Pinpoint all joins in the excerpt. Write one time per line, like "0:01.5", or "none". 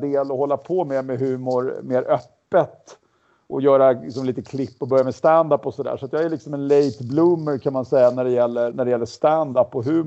0:08.7